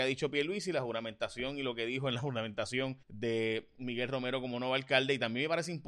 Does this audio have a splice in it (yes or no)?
yes